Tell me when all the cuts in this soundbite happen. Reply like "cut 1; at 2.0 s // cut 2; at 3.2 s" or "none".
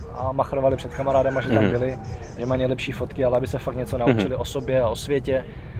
none